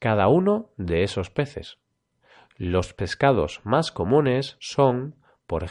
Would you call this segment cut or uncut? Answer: uncut